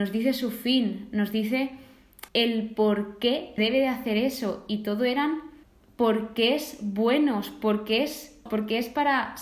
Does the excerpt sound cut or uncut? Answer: cut